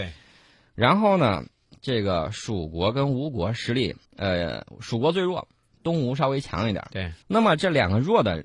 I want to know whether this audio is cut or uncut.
cut